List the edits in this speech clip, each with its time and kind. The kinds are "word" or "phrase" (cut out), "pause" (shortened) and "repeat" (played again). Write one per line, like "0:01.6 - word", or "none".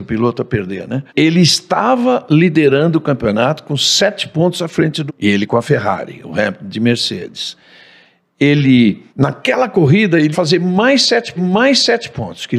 0:01.1 - pause
0:05.1 - word
0:09.1 - pause
0:10.3 - word
0:11.4 - repeat